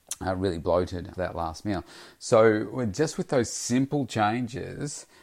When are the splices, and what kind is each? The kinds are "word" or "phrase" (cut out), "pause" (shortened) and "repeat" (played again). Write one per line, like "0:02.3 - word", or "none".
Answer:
0:01.1 - word